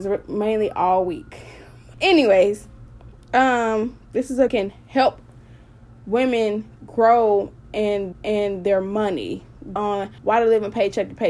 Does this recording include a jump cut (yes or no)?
yes